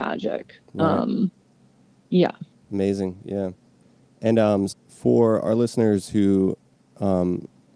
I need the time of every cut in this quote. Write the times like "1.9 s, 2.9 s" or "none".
4.7 s